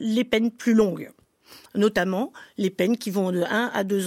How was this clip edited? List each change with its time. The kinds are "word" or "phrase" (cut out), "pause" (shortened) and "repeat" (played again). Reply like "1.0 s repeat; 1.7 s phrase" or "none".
none